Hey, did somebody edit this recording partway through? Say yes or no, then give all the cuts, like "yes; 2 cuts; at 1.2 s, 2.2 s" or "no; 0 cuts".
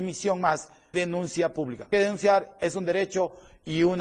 yes; 2 cuts; at 0.9 s, 1.9 s